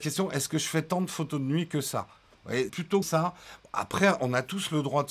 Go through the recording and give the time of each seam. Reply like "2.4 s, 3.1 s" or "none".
2.7 s, 3.0 s